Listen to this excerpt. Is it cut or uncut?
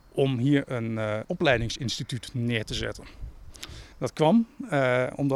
cut